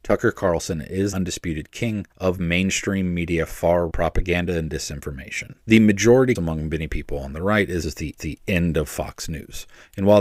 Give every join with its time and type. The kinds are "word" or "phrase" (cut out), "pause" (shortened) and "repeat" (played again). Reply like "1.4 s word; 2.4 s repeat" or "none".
1.1 s word; 2.1 s pause; 3.9 s word; 5.6 s pause; 6.3 s word; 7.8 s word; 8.2 s repeat